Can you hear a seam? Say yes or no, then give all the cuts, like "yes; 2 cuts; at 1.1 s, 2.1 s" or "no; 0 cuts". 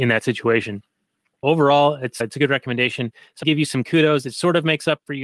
yes; 3 cuts; at 1.4 s, 2.2 s, 3.4 s